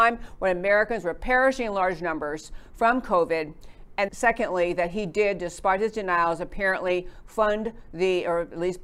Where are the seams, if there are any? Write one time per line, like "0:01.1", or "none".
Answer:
0:04.1

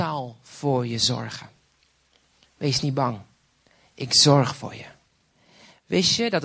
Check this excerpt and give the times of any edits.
none

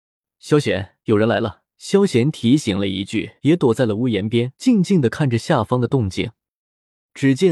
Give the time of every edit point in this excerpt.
0:01.0
0:01.7
0:03.4
0:04.5

